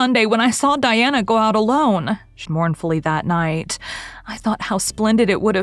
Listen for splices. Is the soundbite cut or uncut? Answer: cut